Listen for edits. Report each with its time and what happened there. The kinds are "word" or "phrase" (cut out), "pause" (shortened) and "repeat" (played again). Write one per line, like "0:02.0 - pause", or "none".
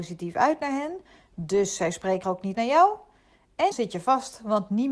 0:02.2 - word
0:02.5 - word
0:03.7 - word